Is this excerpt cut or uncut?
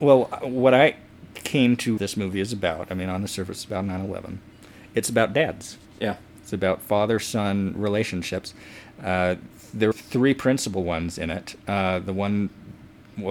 cut